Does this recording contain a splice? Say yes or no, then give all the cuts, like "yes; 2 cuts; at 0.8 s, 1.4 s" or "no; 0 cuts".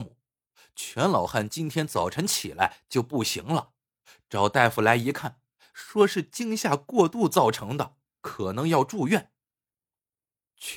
no; 0 cuts